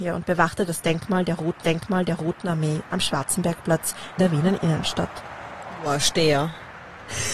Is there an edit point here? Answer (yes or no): yes